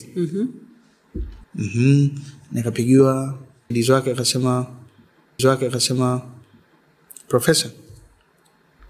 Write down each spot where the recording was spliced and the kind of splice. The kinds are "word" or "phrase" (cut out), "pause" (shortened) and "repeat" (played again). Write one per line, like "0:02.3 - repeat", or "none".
0:01.4 - pause
0:03.7 - word
0:05.4 - repeat